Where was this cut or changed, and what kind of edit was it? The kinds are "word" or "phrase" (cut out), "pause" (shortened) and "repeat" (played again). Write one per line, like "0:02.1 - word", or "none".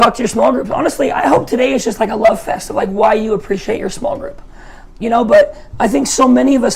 none